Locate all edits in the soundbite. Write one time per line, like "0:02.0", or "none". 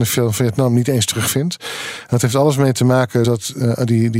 0:03.2